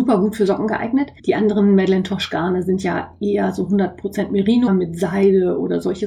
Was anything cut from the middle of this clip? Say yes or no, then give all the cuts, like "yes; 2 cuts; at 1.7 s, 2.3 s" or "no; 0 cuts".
yes; 2 cuts; at 1.2 s, 4.7 s